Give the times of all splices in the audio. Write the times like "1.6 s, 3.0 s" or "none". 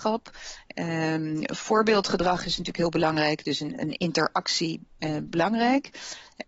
5.3 s